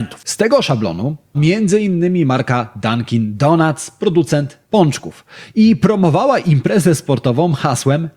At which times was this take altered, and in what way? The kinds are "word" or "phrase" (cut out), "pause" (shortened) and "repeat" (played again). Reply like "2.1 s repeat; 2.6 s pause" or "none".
1.3 s word; 4.6 s pause